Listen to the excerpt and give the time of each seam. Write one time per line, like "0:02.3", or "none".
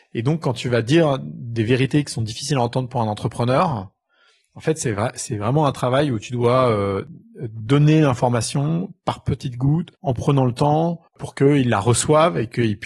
0:09.9
0:11.1